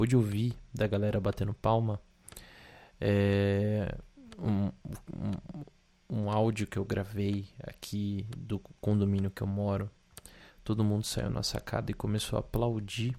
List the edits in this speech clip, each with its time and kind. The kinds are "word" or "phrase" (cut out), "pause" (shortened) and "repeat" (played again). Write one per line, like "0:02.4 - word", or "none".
0:08.8 - pause